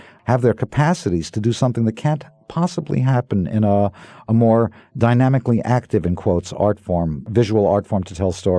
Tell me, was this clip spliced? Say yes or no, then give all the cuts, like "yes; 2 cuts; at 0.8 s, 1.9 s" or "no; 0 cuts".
no; 0 cuts